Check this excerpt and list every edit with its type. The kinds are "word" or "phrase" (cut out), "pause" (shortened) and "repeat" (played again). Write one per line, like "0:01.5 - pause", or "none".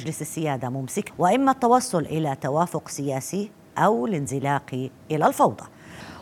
0:01.1 - word